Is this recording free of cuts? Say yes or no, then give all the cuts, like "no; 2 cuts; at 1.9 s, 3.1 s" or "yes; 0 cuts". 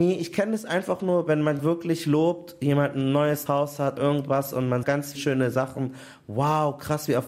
no; 5 cuts; at 1.6 s, 3.5 s, 4.0 s, 4.8 s, 5.1 s